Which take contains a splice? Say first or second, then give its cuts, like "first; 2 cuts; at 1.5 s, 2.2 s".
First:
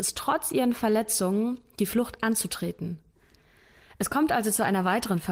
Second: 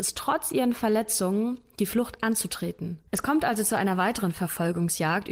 second; 1 cut; at 3.1 s